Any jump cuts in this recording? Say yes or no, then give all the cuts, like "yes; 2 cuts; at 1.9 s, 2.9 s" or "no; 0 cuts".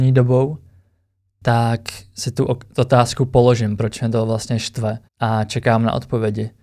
yes; 1 cut; at 5.1 s